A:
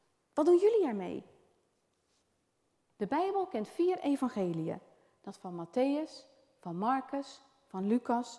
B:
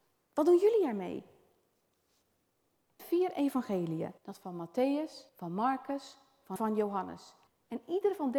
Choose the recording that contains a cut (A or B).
B